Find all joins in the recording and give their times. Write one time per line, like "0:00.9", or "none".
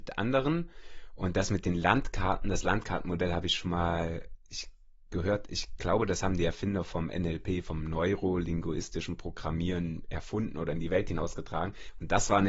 none

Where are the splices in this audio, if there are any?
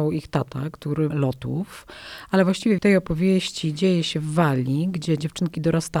0:01.1
0:02.8

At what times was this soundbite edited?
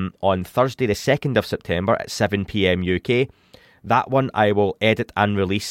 none

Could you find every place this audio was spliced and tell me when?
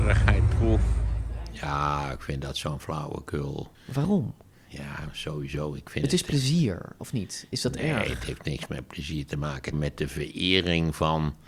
0:03.7
0:09.7

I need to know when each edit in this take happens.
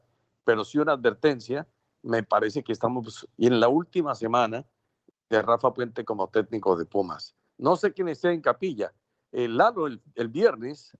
none

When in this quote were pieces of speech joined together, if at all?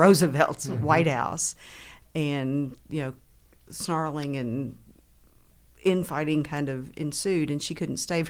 none

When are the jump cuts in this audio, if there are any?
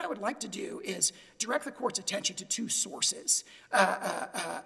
none

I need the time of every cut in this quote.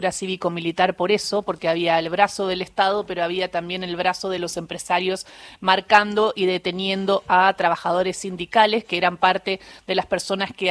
none

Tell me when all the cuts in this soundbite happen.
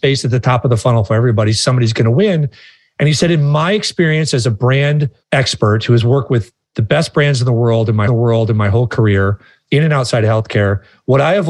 0:05.2
0:08.1

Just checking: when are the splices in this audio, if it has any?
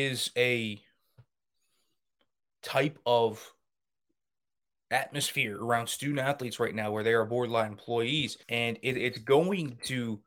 0:08.4

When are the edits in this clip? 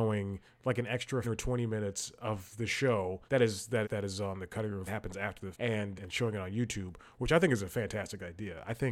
0:01.2
0:03.3
0:03.8
0:04.9
0:05.5
0:06.0

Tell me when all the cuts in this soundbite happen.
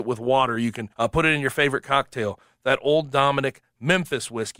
0:00.9

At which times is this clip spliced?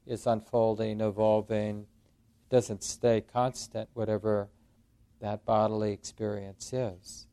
none

